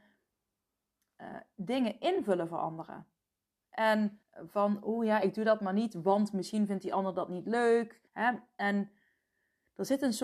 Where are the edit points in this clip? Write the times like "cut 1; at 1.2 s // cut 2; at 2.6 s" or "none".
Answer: cut 1; at 4.2 s // cut 2; at 8.1 s